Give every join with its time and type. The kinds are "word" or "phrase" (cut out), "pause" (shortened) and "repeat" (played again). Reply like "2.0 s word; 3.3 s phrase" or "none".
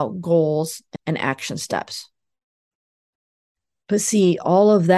1.0 s word